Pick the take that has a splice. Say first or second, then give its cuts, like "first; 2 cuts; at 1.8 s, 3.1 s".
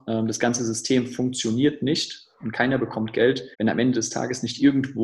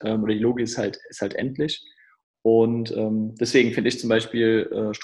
first; 1 cut; at 3.5 s